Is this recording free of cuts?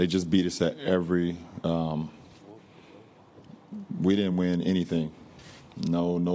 yes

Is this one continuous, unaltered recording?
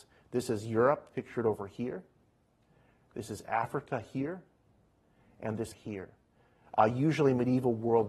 no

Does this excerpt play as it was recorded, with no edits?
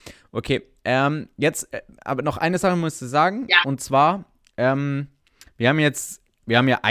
yes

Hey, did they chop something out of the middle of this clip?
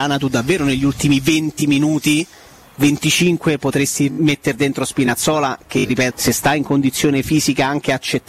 yes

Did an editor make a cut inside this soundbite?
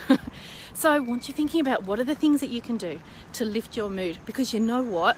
no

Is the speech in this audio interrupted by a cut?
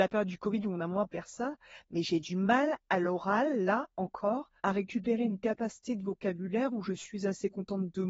yes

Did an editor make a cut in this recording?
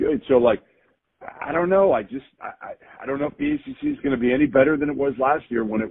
no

